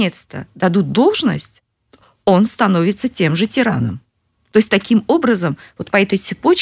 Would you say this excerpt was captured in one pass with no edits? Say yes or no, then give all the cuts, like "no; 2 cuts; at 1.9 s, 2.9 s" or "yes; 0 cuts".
yes; 0 cuts